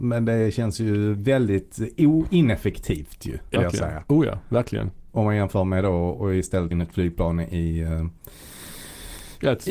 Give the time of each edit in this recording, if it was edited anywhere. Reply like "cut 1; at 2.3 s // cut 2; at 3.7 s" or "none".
cut 1; at 3.6 s // cut 2; at 5.1 s // cut 3; at 6.7 s